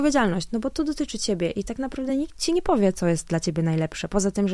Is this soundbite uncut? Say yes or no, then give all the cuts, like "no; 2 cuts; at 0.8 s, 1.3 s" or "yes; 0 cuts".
yes; 0 cuts